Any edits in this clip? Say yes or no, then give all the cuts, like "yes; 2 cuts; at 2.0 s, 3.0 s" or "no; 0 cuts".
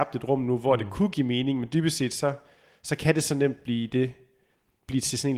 no; 0 cuts